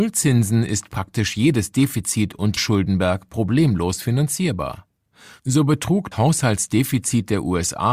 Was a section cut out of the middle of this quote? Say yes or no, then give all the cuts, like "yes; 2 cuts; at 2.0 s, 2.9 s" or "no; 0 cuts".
yes; 2 cuts; at 2.6 s, 6.1 s